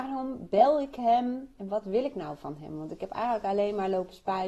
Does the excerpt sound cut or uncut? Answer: uncut